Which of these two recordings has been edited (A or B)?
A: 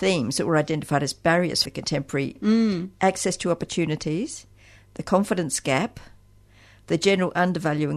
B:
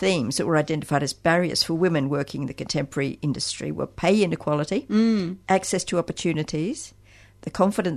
A